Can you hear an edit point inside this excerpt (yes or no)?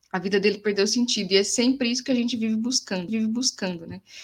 yes